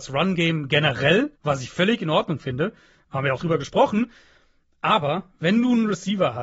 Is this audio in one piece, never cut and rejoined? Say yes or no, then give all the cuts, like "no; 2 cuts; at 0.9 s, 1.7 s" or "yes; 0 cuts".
no; 2 cuts; at 1.3 s, 3.4 s